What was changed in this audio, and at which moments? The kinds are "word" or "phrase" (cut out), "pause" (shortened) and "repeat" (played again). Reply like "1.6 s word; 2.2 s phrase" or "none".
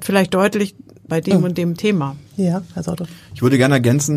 1.1 s phrase; 2.3 s pause